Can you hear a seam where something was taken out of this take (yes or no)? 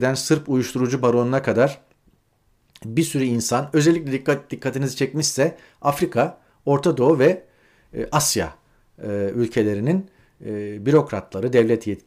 no